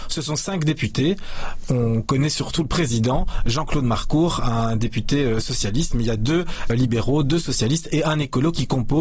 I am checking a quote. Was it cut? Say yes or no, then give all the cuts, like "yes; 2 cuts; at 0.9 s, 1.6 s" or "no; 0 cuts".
no; 0 cuts